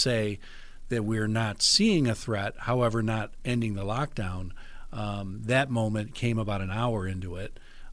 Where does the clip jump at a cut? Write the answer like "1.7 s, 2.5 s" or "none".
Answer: none